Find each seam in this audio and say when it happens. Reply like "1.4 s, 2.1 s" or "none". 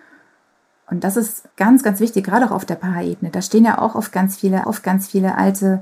1.5 s, 4.6 s